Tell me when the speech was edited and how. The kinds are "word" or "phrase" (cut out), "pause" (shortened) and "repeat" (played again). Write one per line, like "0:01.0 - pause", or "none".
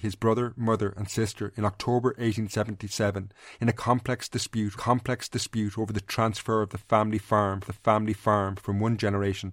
0:04.7 - repeat
0:07.6 - repeat